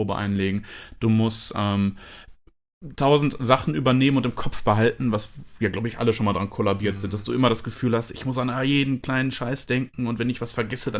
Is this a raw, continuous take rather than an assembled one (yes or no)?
yes